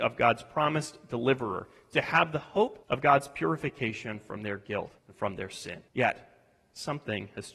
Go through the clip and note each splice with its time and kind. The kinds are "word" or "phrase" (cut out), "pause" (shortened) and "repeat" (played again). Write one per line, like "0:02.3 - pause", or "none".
0:02.8 - pause
0:05.0 - pause
0:05.9 - pause